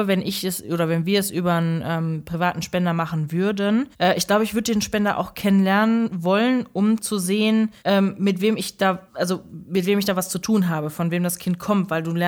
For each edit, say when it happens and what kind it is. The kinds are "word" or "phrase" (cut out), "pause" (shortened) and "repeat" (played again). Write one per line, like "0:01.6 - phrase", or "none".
0:03.9 - pause
0:07.8 - pause
0:09.1 - pause